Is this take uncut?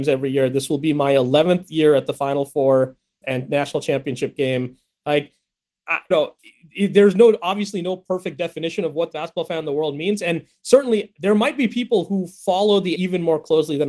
no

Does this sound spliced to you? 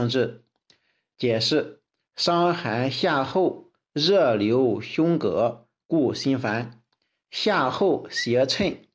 no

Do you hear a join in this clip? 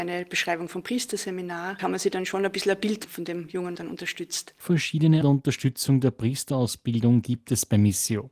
yes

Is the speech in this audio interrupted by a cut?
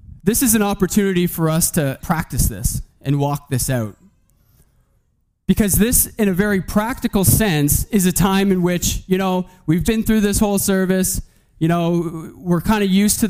yes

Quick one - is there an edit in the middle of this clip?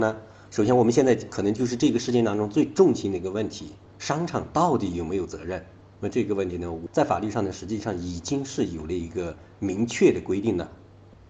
no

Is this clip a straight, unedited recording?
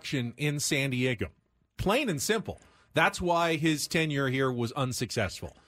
yes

